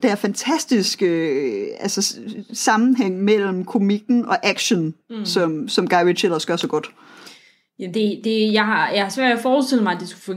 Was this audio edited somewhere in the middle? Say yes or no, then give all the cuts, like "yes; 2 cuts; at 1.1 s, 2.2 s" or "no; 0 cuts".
no; 0 cuts